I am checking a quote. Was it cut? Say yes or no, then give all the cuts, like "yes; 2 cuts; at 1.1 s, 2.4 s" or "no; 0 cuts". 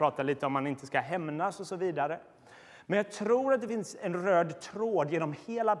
no; 0 cuts